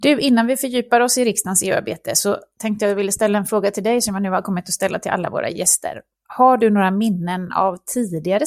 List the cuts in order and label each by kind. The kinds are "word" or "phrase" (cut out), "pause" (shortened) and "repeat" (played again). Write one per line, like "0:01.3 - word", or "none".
none